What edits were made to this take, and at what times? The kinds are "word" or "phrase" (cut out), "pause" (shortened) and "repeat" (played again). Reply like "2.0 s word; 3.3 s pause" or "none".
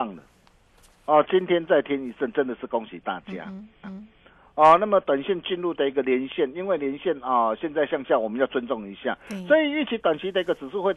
3.8 s repeat